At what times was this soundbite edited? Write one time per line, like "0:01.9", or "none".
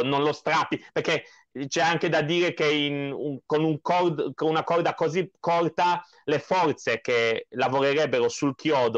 none

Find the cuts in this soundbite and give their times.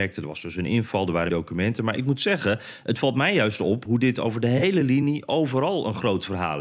0:01.3

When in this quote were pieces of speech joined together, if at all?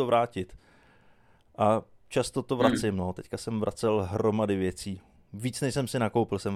none

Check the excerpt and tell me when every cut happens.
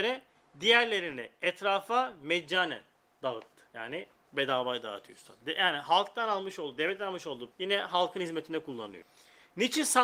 0:03.7
0:07.5

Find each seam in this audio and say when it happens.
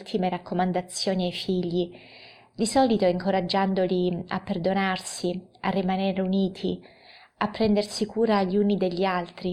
none

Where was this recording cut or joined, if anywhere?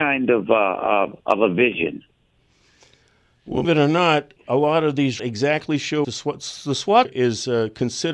0:01.2
0:03.6
0:04.4
0:05.2
0:06.0
0:07.0

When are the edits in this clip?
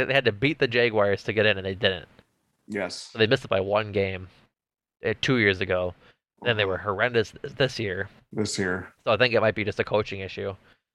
0:03.5

